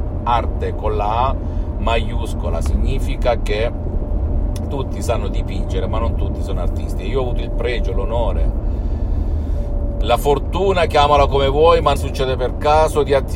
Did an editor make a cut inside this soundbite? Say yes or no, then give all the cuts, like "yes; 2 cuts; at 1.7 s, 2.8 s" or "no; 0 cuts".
yes; 1 cut; at 12.0 s